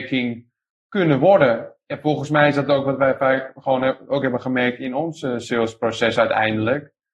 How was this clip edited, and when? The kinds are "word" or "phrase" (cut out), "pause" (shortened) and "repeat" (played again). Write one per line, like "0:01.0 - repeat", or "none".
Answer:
none